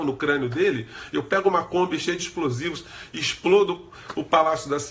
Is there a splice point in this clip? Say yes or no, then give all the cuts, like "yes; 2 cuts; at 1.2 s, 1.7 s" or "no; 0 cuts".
no; 0 cuts